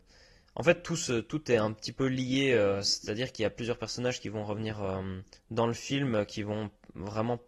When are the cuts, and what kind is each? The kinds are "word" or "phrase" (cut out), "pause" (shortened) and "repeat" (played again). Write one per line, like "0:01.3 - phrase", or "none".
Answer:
0:05.4 - pause